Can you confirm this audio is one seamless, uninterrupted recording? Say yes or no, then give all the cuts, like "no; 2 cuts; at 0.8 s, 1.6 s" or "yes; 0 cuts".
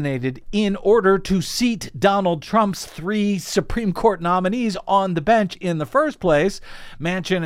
yes; 0 cuts